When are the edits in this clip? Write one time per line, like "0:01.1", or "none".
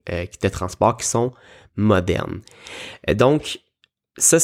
none